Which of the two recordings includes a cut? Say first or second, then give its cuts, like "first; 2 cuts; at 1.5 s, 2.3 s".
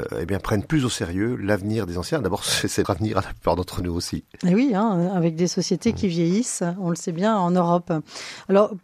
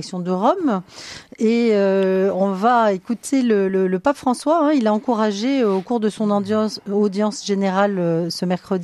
first; 1 cut; at 2.8 s